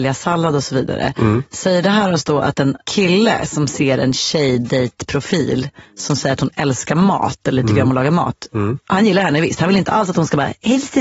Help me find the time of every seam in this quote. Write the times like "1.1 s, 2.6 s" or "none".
2.8 s, 5.8 s, 8.8 s